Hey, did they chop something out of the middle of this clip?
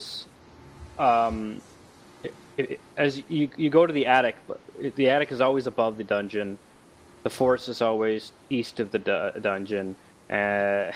no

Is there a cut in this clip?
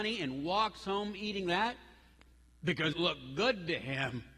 yes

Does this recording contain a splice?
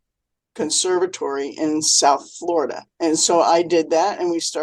yes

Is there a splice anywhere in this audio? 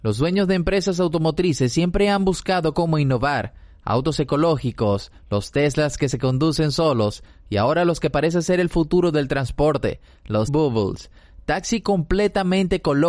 yes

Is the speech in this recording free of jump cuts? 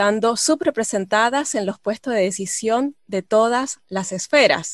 yes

